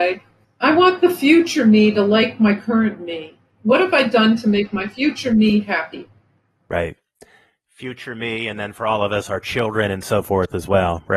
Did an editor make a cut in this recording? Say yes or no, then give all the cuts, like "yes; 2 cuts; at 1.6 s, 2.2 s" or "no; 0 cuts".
no; 0 cuts